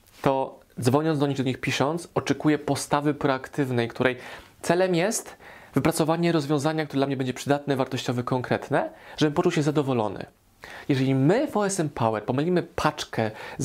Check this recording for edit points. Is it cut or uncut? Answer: uncut